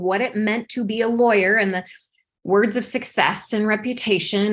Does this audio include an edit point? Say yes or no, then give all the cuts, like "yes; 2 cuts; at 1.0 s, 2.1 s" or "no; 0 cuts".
no; 0 cuts